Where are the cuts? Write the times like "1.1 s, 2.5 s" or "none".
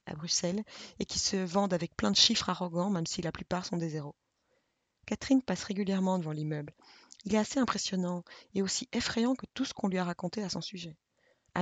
none